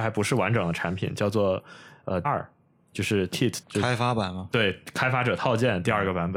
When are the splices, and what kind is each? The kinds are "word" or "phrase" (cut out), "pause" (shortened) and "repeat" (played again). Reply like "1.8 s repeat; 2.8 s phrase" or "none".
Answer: 2.2 s word; 3.3 s word; 3.6 s word